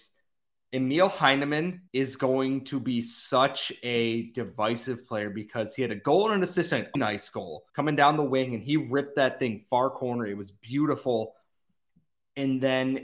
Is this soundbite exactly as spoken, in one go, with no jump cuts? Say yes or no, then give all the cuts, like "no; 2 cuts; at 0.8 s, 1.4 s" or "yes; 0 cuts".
no; 3 cuts; at 1.9 s, 7.0 s, 7.7 s